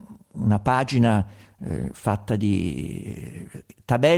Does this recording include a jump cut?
no; 0 cuts

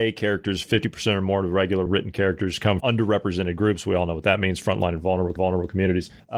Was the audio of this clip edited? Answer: yes; 3 cuts; at 1.9 s, 2.8 s, 5.4 s

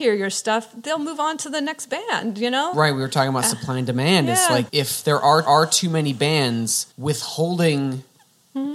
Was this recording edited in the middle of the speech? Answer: yes; 4 cuts; at 2.7 s, 4.7 s, 5.4 s, 6.9 s

